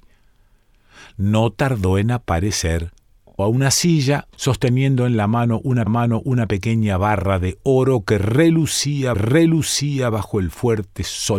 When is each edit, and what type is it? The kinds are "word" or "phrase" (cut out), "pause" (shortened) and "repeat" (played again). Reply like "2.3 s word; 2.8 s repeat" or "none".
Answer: 3.4 s word; 4.3 s pause; 5.9 s repeat; 9.1 s repeat